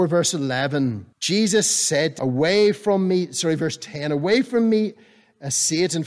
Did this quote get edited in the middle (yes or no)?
yes